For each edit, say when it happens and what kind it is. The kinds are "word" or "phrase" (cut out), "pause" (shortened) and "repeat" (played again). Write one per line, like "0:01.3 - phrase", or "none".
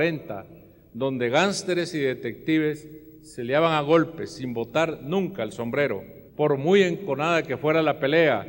0:06.3 - pause

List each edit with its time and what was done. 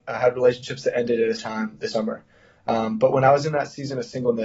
0:01.4 - word
0:01.9 - word

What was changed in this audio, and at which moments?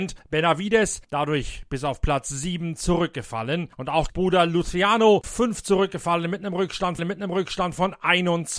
0:04.1 - word
0:05.2 - phrase
0:07.0 - repeat

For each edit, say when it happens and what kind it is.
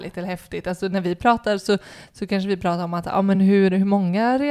none

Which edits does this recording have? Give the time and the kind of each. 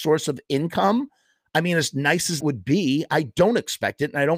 0:02.4 - word

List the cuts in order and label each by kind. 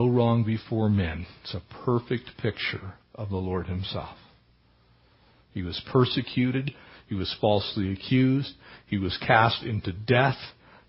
none

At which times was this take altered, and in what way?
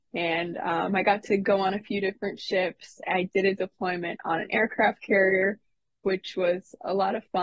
none

